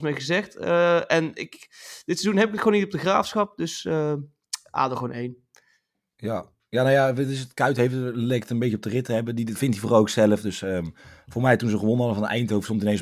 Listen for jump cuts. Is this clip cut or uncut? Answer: uncut